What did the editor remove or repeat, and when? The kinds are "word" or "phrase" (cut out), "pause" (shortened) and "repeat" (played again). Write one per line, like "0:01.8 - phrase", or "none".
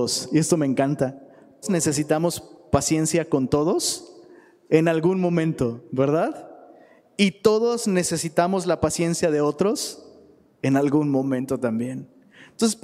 0:01.6 - word